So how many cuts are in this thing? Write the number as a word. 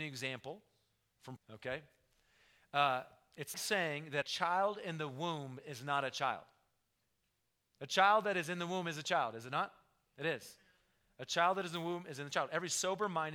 three